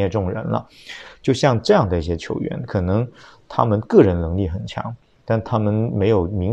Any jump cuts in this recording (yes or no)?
no